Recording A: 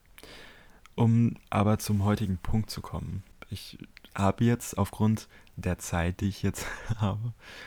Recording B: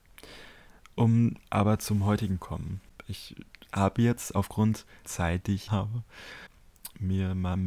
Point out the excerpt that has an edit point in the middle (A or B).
B